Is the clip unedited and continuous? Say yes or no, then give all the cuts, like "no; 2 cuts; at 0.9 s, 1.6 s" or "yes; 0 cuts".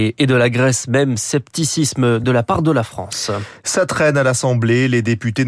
yes; 0 cuts